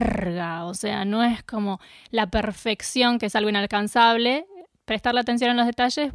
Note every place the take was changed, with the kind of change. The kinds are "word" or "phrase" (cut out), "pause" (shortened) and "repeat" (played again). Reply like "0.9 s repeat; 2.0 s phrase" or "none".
none